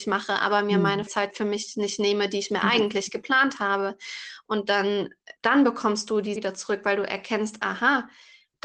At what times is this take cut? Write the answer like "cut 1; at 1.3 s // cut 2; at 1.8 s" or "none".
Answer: cut 1; at 1.1 s // cut 2; at 5.4 s // cut 3; at 6.4 s